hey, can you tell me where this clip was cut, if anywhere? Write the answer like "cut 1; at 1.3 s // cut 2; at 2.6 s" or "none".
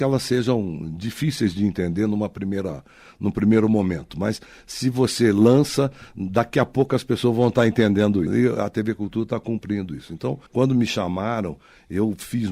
cut 1; at 8.3 s // cut 2; at 10.5 s

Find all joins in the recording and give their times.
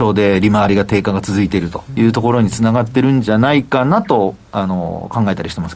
cut 1; at 1.9 s

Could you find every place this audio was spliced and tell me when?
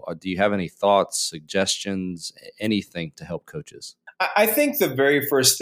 none

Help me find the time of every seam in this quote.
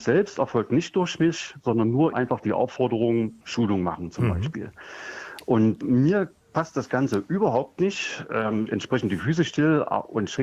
cut 1; at 2.1 s // cut 2; at 3.4 s // cut 3; at 5.8 s // cut 4; at 8.7 s

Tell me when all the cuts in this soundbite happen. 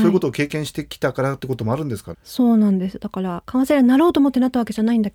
cut 1; at 2.1 s

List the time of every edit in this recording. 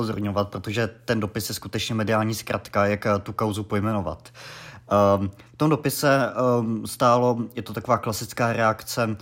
none

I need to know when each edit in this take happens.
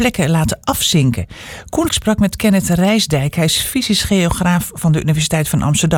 cut 1; at 1.9 s

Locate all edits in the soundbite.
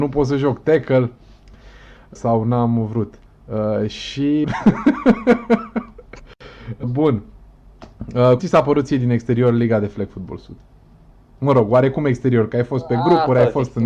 cut 1; at 2.2 s // cut 2; at 4.4 s // cut 3; at 6.8 s // cut 4; at 8.4 s

